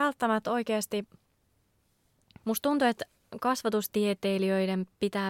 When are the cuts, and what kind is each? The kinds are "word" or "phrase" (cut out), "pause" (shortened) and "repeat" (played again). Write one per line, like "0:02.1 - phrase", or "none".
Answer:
0:02.4 - word